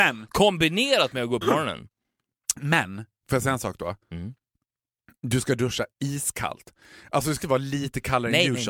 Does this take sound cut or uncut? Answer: cut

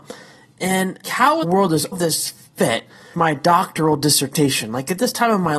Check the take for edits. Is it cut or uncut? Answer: cut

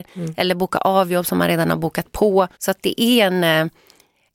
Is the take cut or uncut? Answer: cut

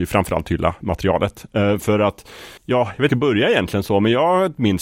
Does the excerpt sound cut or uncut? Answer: cut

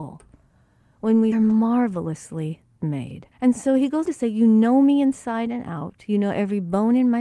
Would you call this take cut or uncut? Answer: cut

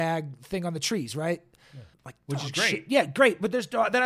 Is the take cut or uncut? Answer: cut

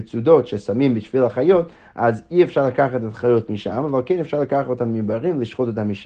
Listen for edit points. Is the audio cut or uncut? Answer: uncut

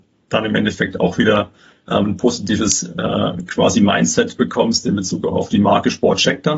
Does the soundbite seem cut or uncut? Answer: uncut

